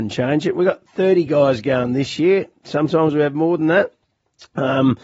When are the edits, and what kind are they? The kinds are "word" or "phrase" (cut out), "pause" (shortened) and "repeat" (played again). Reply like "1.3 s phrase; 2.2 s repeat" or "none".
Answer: none